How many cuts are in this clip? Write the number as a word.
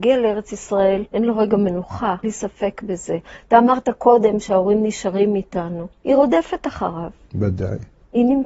three